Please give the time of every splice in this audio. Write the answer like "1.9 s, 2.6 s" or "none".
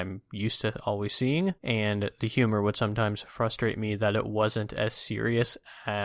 1.6 s

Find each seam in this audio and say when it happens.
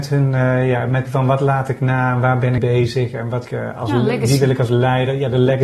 1.0 s, 2.6 s, 3.4 s

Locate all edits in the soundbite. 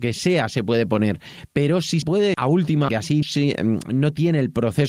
2.0 s, 2.3 s, 2.9 s, 3.2 s

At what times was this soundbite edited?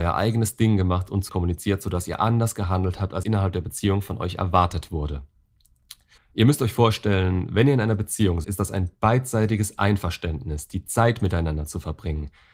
1.3 s, 3.2 s, 6.2 s, 8.4 s

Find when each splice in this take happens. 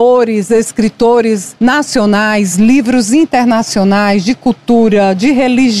none

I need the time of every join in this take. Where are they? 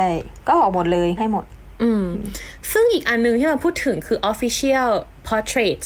1.2 s

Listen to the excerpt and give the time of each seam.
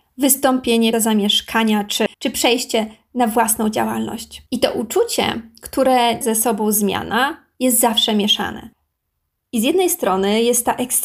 0.9 s, 2.1 s, 4.5 s, 6.2 s

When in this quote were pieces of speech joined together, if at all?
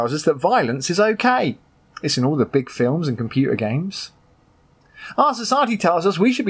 none

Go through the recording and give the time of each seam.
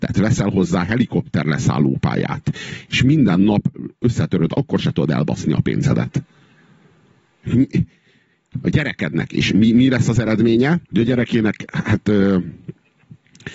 4.5 s, 10.8 s

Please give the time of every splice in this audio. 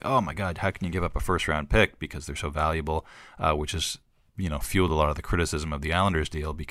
none

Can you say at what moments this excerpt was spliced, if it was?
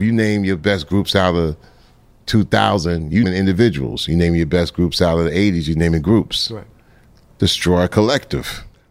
3.2 s

